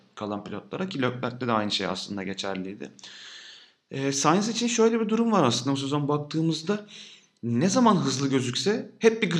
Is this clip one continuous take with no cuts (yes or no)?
yes